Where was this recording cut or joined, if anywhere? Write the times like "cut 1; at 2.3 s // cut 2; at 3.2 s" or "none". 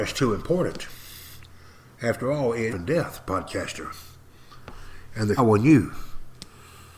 cut 1; at 2.7 s // cut 2; at 5.4 s